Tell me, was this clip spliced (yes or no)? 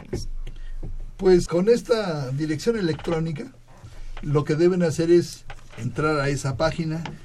yes